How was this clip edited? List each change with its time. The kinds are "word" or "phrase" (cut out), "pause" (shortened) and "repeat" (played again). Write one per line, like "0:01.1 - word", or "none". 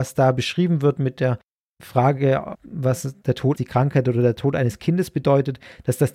0:02.5 - word
0:03.5 - phrase